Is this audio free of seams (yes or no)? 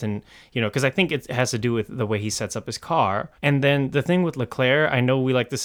no